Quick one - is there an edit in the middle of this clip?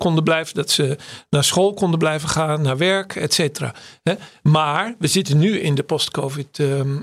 no; 0 cuts

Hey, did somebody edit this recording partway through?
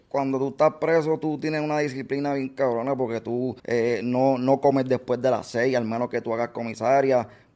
yes; 1 cut; at 3.6 s

